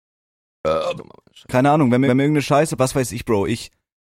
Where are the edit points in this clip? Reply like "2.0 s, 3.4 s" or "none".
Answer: 1.0 s, 2.1 s, 2.8 s